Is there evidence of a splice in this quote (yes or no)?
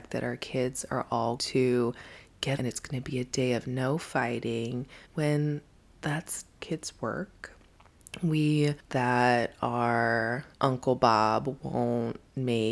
yes